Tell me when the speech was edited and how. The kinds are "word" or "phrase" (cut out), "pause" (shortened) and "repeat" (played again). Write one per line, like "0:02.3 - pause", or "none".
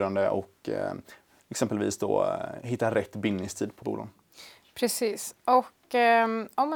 0:03.8 - word

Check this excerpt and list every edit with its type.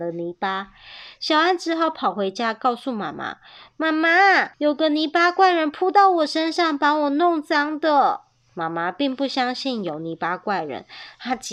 0:04.5 - pause

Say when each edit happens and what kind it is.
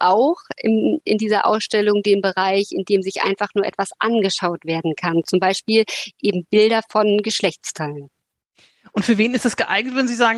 none

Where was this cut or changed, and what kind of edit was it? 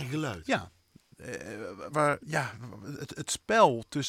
0:01.9 - word
0:02.2 - word

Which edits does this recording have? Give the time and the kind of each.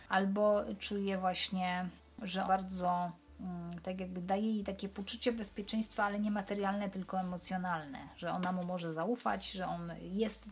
0:02.5 - phrase

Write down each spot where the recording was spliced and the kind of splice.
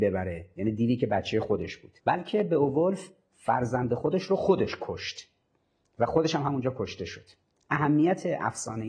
0:02.0 - pause

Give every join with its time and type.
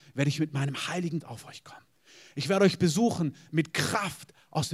0:01.2 - word

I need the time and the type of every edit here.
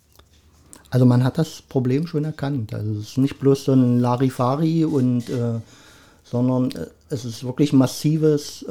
none

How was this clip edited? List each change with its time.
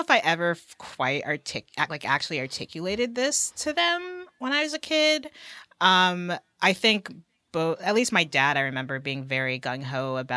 0:07.7 - word

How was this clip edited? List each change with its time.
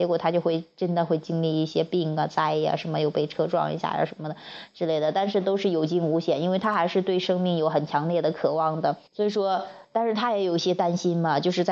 0:09.1 - pause

